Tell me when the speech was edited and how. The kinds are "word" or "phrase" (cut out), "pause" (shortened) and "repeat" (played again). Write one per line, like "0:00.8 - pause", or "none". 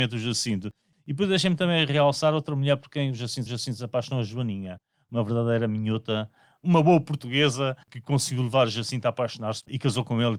0:03.5 - repeat
0:07.8 - pause